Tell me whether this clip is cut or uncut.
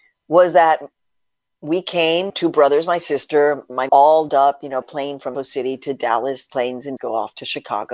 cut